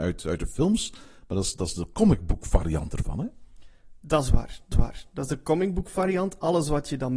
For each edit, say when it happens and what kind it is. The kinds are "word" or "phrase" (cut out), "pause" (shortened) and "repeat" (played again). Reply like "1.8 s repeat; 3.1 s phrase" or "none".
4.7 s repeat